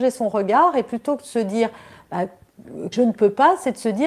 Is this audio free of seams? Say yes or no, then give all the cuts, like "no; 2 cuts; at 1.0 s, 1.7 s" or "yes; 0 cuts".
no; 1 cut; at 2.9 s